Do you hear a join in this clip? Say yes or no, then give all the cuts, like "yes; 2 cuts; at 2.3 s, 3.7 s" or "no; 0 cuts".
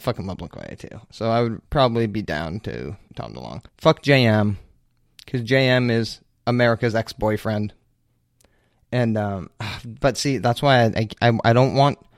yes; 3 cuts; at 1.7 s, 3.1 s, 3.7 s